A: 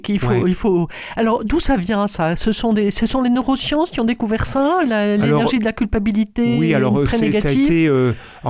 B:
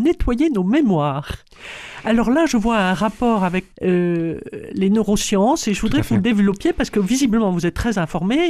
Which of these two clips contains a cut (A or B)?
B